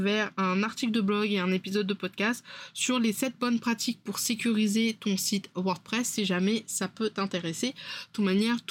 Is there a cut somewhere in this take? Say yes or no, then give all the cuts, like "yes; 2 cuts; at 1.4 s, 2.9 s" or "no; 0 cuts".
no; 0 cuts